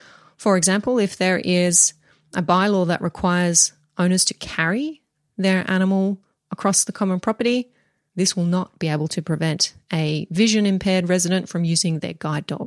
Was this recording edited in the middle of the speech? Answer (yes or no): no